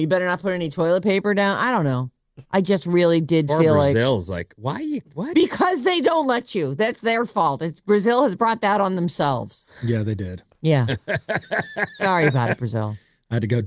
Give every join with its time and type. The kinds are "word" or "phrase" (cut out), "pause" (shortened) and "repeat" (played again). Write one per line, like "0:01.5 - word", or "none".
0:02.4 - pause

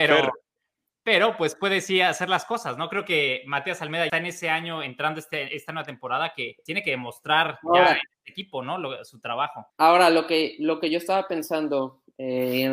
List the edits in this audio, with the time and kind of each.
0:04.1 - phrase
0:06.7 - word
0:09.7 - pause

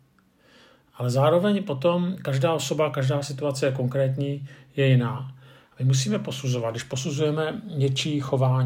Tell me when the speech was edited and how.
none

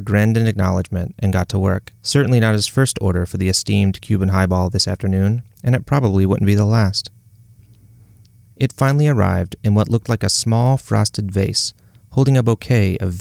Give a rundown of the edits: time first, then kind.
0:01.9 - pause

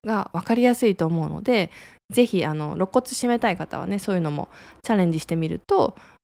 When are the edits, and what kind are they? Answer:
none

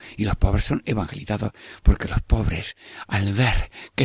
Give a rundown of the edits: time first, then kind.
none

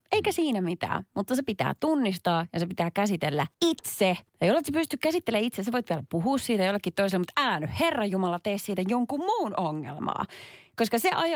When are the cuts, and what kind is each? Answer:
0:03.5 - pause
0:04.3 - pause

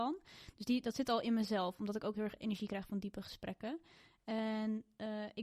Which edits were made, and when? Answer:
none

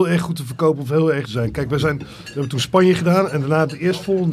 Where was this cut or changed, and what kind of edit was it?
0:01.3 - phrase

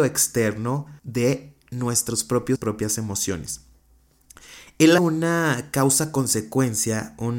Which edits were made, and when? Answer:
0:01.0 - pause
0:02.6 - phrase
0:05.0 - word

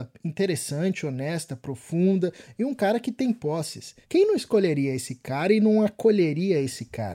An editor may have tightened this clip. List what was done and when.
0:04.0 - pause

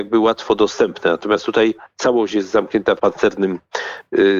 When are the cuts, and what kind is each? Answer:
0:03.0 - word

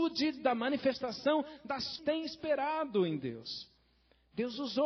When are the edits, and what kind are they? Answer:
0:02.0 - phrase

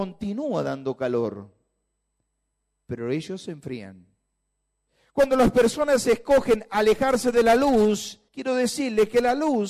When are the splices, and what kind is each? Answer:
0:08.3 - pause

